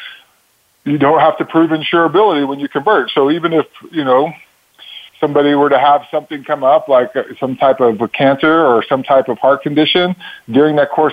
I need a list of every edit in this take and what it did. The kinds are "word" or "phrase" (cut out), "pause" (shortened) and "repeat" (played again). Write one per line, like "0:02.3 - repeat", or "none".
0:05.1 - pause